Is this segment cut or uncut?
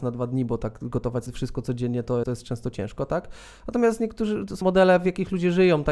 cut